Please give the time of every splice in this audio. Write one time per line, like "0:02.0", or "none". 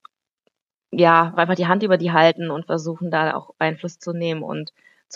0:01.4

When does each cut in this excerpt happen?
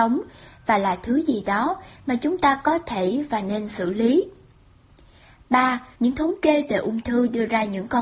0:05.9

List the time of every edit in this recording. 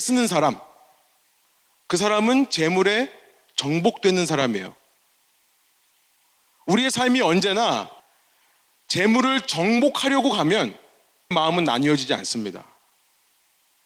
0:11.3

